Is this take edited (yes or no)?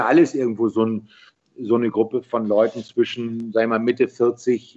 no